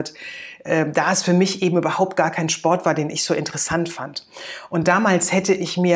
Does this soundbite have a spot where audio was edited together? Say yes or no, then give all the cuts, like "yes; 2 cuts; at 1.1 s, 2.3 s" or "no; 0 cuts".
no; 0 cuts